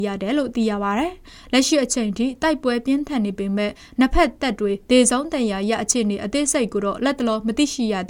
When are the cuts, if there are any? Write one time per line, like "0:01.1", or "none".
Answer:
none

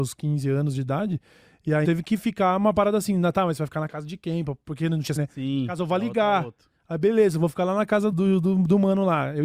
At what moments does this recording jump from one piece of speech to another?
0:01.8
0:05.2
0:08.1

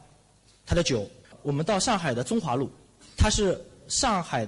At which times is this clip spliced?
none

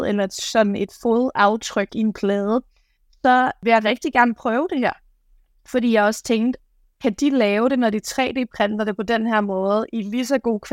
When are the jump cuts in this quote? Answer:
none

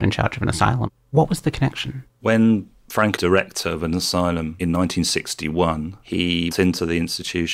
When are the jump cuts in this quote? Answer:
0:03.2
0:06.5

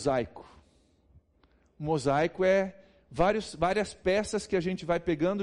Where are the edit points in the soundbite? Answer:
none

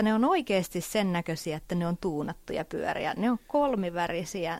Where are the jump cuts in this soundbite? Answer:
none

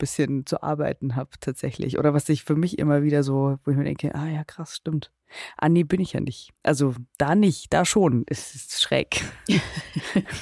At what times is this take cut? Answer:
0:06.5

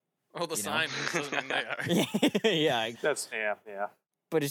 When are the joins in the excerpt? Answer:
0:02.9
0:03.3

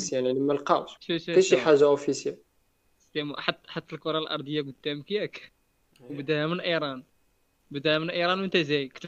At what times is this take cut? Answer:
0:01.0

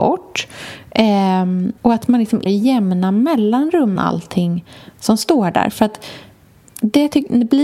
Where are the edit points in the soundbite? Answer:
0:01.8
0:02.5
0:04.0

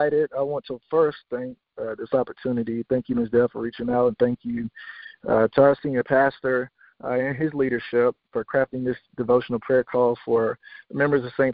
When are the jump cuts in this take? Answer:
none

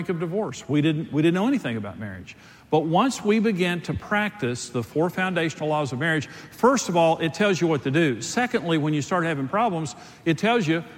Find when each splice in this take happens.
none

